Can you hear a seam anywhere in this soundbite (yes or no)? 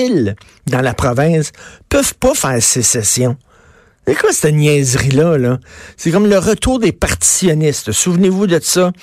no